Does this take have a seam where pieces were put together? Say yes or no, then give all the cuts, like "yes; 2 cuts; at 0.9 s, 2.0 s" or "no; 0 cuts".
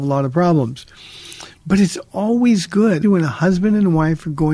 yes; 1 cut; at 3.0 s